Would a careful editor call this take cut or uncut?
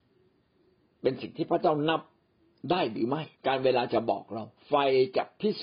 cut